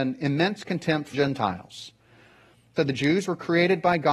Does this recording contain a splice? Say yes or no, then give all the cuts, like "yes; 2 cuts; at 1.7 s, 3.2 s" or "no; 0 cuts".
yes; 2 cuts; at 1.1 s, 2.8 s